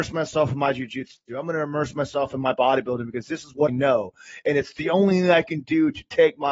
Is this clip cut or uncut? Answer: cut